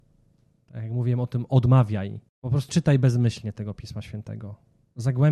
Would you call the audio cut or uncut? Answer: cut